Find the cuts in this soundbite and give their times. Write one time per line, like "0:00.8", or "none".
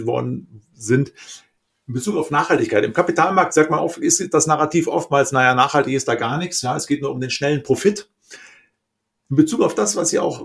none